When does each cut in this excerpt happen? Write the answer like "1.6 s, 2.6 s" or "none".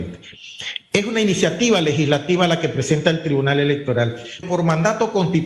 4.4 s